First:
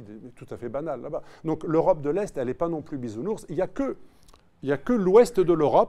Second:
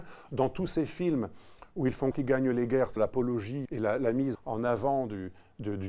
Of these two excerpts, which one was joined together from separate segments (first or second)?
second